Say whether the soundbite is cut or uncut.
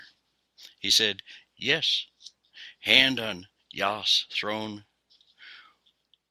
uncut